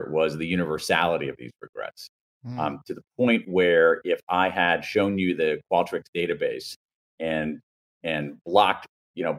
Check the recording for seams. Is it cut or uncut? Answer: uncut